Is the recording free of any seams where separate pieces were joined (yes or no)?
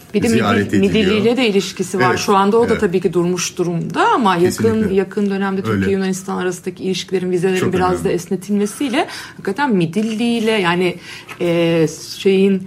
yes